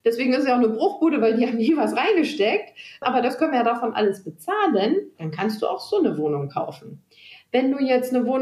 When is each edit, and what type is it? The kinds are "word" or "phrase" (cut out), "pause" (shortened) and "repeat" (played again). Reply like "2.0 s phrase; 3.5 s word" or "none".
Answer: 5.1 s pause